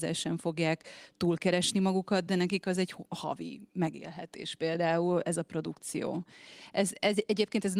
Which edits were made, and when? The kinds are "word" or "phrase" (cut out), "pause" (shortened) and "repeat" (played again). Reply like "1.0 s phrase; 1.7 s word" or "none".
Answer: none